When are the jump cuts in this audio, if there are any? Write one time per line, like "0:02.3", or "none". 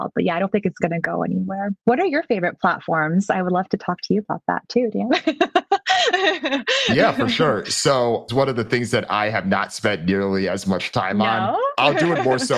0:01.8
0:08.3